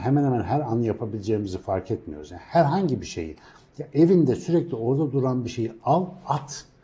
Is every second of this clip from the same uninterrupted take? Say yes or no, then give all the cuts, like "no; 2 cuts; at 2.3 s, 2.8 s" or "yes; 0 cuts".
yes; 0 cuts